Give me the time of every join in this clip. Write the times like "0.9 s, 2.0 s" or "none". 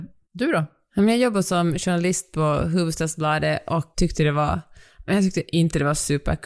3.9 s